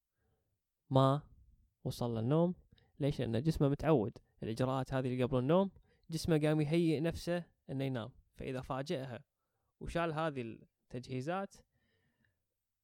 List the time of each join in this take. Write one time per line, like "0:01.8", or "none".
none